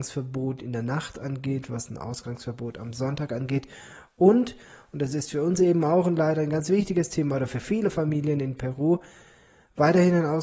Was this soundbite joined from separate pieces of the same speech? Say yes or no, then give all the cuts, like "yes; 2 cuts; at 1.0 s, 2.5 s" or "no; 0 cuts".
no; 0 cuts